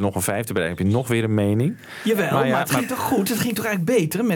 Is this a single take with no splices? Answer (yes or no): yes